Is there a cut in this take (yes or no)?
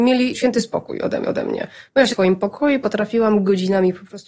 yes